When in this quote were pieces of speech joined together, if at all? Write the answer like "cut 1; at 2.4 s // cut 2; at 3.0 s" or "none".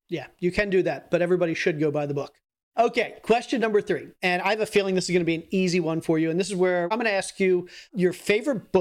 none